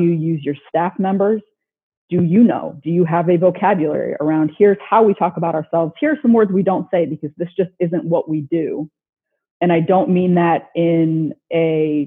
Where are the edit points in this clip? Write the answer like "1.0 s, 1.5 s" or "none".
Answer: none